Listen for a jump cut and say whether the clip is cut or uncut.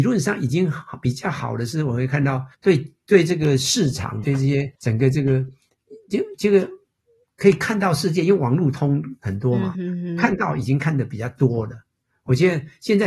cut